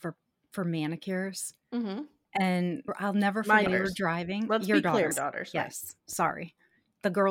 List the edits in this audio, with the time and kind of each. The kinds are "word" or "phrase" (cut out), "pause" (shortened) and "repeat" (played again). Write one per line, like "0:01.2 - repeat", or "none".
0:02.9 - word
0:03.7 - word
0:05.1 - word